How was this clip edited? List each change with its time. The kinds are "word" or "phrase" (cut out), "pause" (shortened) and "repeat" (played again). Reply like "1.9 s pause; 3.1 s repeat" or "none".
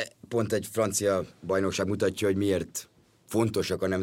none